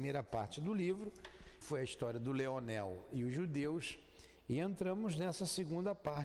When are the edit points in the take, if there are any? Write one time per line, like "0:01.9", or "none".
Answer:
0:01.6